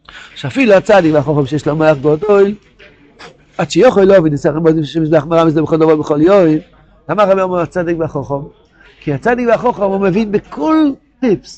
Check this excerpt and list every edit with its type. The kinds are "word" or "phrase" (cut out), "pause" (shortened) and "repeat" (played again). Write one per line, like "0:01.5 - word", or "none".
none

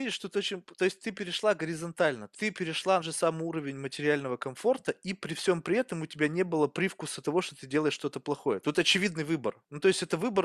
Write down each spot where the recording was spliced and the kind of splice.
0:02.3 - word
0:03.0 - phrase

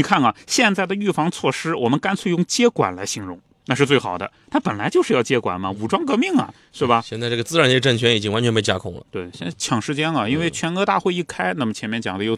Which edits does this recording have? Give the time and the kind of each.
none

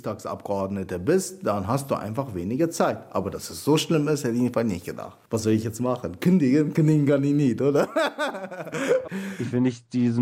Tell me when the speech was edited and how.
0:05.2 - pause

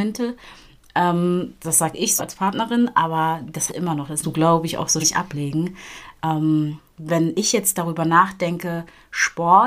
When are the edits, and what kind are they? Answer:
0:02.2 - word
0:03.7 - word
0:04.2 - phrase
0:05.0 - word

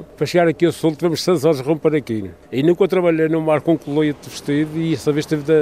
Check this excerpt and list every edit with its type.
none

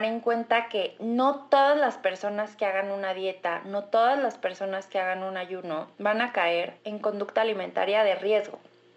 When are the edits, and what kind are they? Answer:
0:05.9 - pause
0:06.8 - pause

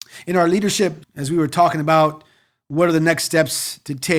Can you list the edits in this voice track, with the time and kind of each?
0:01.0 - phrase

